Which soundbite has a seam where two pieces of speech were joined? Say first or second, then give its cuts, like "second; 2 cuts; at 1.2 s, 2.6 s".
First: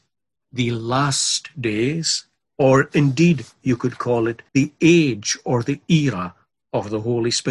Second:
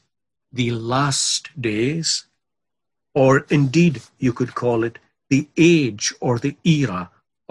first; 2 cuts; at 2.4 s, 4.5 s